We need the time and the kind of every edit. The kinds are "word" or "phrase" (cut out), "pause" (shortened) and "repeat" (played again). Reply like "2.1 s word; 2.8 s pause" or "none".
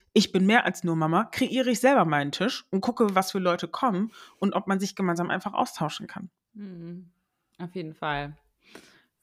none